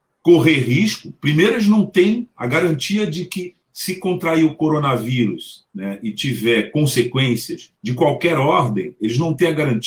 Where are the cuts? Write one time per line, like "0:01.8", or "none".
0:05.7
0:07.8